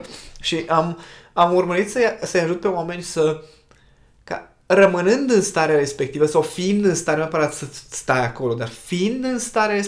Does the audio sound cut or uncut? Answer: uncut